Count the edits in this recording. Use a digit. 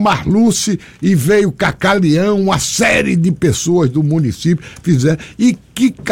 0